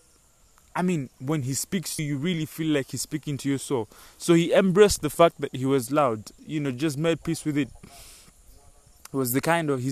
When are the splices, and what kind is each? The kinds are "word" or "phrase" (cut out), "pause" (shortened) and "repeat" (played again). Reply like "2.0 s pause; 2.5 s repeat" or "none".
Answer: 2.0 s word; 6.4 s word